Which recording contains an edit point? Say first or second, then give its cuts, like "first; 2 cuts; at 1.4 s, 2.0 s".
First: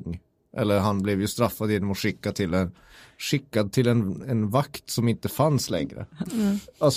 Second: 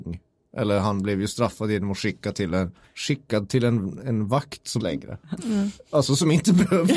second; 2 cuts; at 2.8 s, 4.8 s